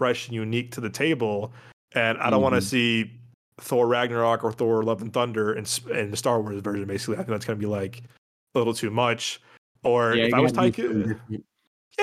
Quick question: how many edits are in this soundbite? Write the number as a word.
zero